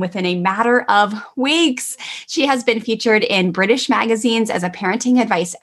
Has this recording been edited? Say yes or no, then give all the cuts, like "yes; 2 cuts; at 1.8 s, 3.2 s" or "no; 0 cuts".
no; 0 cuts